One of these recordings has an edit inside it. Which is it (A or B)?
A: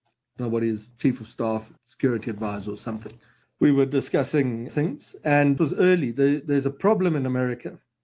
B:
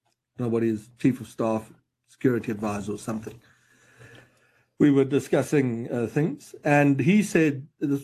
A